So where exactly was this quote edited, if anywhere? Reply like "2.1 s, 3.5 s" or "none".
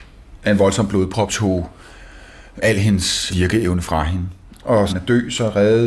1.3 s, 2.6 s, 3.3 s, 4.9 s